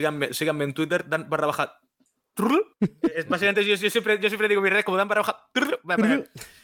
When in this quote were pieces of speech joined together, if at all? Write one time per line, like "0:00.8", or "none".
0:02.7